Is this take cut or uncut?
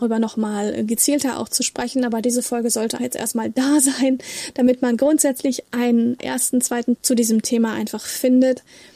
cut